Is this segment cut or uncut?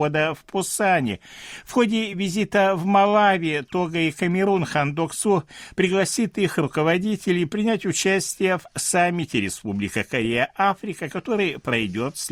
uncut